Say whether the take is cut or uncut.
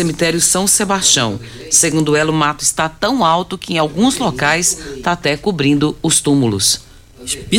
uncut